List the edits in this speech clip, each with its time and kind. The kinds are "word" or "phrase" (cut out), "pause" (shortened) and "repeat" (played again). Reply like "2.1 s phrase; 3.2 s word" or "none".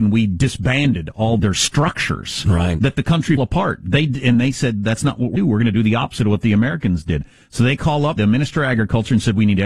1.4 s word; 3.4 s word; 5.4 s word; 8.2 s word